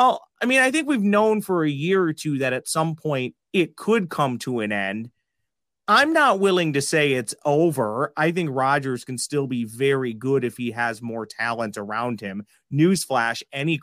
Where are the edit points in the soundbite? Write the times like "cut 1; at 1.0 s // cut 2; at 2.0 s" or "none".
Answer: cut 1; at 3.4 s